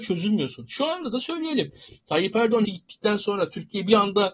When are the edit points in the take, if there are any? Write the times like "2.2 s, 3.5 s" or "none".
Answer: 2.6 s

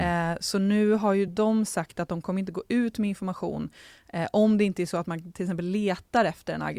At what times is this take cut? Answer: none

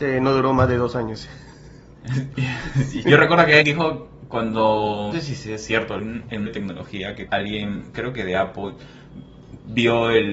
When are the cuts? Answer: 3.0 s, 3.6 s, 5.1 s, 6.0 s, 6.5 s, 7.3 s

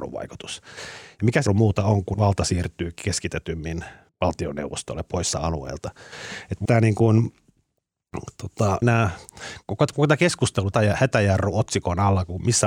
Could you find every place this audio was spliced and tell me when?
1.5 s, 2.1 s, 4.1 s, 5.3 s, 6.6 s, 8.8 s, 9.6 s, 10.7 s

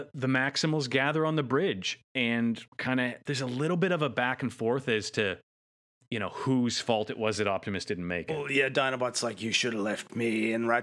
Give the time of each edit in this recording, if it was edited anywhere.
2.7 s

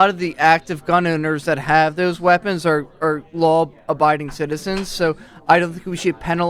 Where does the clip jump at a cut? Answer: none

